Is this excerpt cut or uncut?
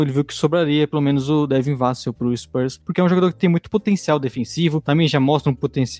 uncut